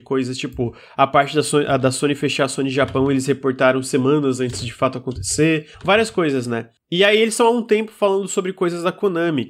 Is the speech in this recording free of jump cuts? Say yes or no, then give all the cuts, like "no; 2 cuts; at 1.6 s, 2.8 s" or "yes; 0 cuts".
no; 1 cut; at 5.7 s